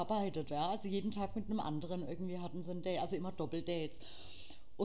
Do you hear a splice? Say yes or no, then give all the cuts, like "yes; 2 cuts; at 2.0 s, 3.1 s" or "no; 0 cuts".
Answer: no; 0 cuts